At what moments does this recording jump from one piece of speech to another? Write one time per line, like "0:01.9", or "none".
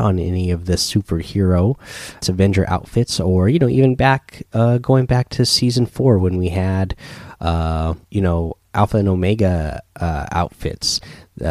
0:02.2
0:08.0